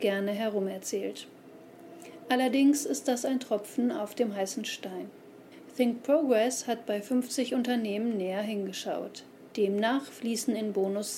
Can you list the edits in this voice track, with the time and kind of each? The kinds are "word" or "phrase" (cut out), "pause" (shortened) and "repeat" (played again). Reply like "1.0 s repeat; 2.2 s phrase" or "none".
9.5 s pause